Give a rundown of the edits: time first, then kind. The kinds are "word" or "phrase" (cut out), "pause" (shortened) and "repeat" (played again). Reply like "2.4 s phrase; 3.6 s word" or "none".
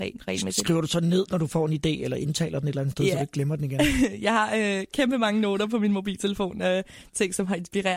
none